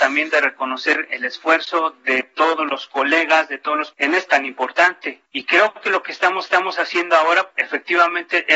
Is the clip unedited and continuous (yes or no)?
no